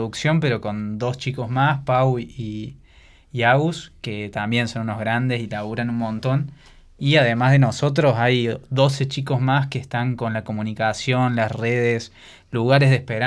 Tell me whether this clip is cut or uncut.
uncut